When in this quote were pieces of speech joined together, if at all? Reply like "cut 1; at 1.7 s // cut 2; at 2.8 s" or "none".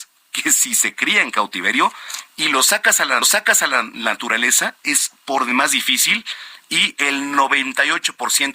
cut 1; at 3.2 s